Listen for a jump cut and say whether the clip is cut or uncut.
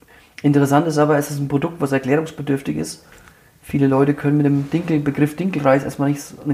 uncut